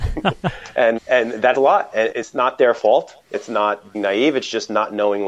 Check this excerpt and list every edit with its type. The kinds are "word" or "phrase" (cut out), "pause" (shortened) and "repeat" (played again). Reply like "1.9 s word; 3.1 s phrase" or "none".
1.0 s word; 1.5 s word; 2.1 s word; 3.3 s word; 3.9 s word